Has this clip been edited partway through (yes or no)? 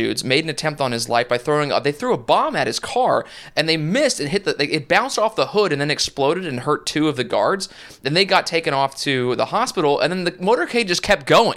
no